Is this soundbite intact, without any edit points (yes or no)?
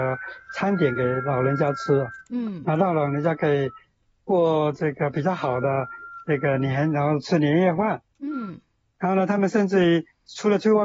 yes